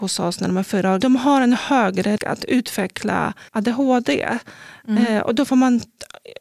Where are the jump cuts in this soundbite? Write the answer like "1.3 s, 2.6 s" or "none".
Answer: 1.0 s, 2.2 s, 3.5 s